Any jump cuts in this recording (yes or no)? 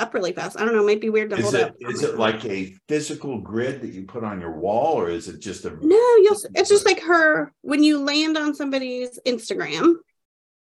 no